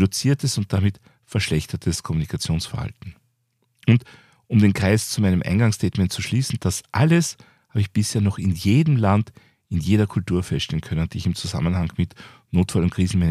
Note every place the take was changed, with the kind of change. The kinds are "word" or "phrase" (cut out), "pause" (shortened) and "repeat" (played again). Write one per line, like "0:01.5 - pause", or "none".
none